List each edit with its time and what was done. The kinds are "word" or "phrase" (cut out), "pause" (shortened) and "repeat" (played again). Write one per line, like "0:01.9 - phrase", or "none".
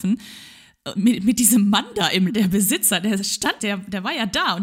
0:02.3 - word
0:03.6 - phrase